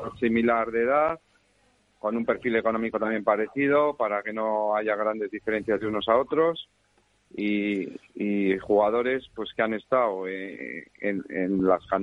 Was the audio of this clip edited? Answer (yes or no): no